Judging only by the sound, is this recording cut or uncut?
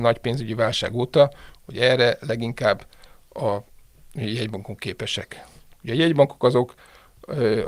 uncut